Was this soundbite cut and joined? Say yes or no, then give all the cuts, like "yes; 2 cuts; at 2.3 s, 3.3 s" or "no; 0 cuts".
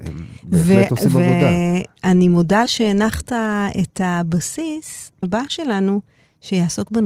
yes; 2 cuts; at 2.7 s, 5.2 s